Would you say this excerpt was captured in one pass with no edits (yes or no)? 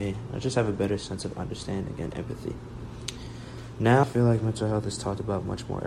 no